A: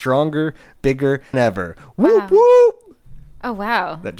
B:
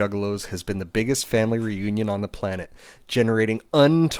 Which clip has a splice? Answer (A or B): A